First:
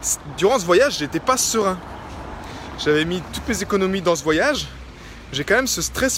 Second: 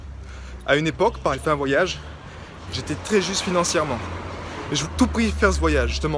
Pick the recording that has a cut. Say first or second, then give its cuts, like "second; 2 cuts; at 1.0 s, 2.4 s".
second; 4 cuts; at 1.3 s, 2.7 s, 3.0 s, 4.8 s